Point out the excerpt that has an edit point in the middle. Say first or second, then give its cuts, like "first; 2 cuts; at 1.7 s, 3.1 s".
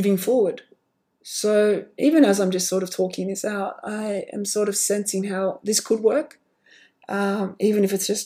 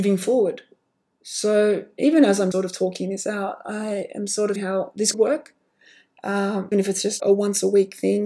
second; 5 cuts; at 2.5 s, 4.6 s, 5.1 s, 6.7 s, 7.2 s